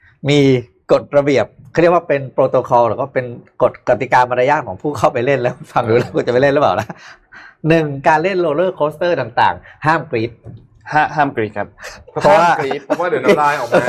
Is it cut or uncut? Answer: uncut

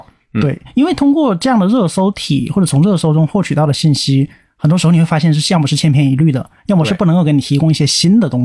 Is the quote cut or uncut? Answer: uncut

